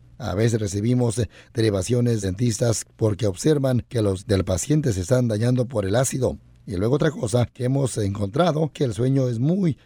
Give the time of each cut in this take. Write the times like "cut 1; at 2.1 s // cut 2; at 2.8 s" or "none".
cut 1; at 2.2 s // cut 2; at 4.2 s // cut 3; at 8.7 s